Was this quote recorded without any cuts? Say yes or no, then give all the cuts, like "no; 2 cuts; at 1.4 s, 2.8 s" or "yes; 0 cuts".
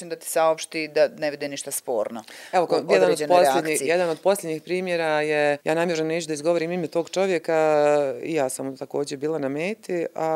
no; 1 cut; at 5.6 s